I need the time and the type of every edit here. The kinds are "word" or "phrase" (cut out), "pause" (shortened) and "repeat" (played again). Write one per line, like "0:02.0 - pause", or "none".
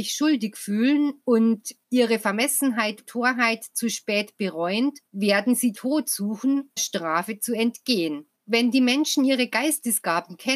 0:01.8 - pause
0:03.0 - word
0:05.1 - pause
0:05.7 - word
0:06.8 - phrase
0:08.4 - pause